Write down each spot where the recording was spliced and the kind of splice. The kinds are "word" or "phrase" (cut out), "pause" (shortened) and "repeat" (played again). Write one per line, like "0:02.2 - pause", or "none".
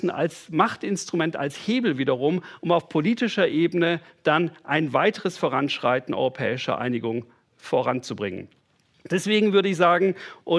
none